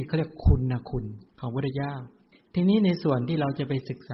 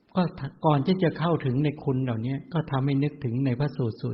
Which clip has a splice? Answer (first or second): first